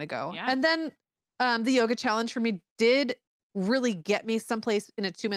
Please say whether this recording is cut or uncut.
uncut